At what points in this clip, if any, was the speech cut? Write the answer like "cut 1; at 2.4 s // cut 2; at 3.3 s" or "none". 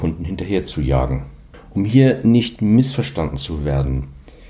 none

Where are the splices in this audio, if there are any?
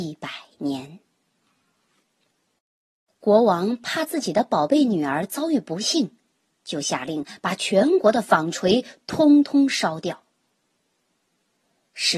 none

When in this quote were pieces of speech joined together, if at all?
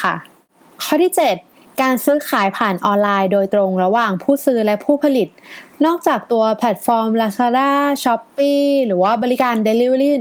none

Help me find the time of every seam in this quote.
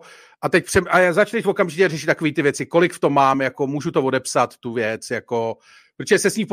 none

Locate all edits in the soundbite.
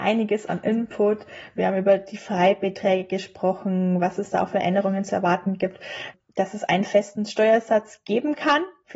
none

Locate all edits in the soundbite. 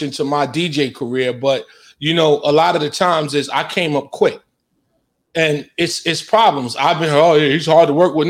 none

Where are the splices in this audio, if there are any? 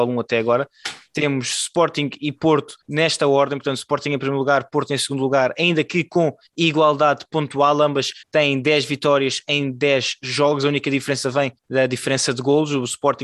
cut 1; at 2.8 s // cut 2; at 6.5 s // cut 3; at 8.2 s // cut 4; at 11.6 s

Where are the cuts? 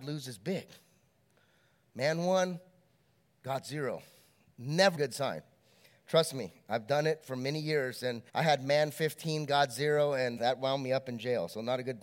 cut 1; at 4.9 s // cut 2; at 8.3 s // cut 3; at 10.4 s

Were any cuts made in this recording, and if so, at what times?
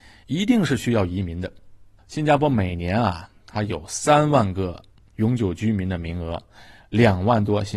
cut 1; at 2.0 s

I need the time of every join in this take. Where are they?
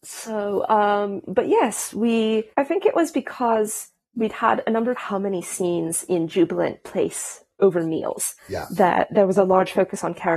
cut 1; at 2.5 s // cut 2; at 4.9 s // cut 3; at 6.8 s // cut 4; at 8.4 s

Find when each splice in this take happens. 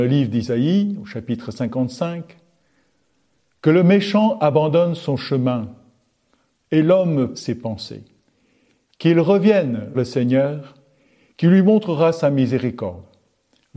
cut 1; at 7.3 s // cut 2; at 9.9 s

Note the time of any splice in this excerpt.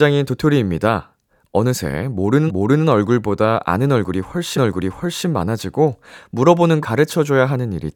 cut 1; at 2.5 s // cut 2; at 4.6 s // cut 3; at 6.8 s

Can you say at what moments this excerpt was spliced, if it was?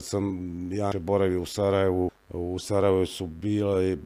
cut 1; at 0.9 s // cut 2; at 2.1 s

